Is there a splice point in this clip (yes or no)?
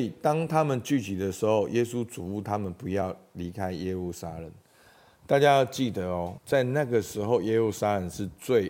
yes